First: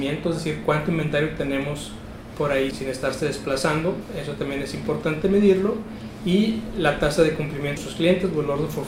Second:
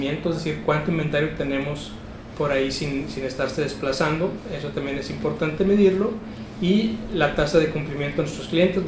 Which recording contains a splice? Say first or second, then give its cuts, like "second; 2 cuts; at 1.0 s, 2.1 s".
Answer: first; 2 cuts; at 2.7 s, 7.8 s